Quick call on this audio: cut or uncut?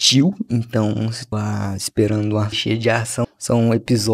cut